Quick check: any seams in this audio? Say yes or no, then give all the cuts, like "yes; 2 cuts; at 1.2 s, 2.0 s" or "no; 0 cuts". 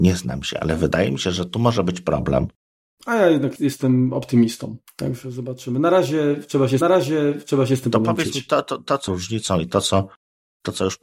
yes; 3 cuts; at 3.6 s, 6.8 s, 9.1 s